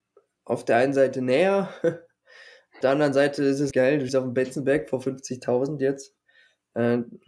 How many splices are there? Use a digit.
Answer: 3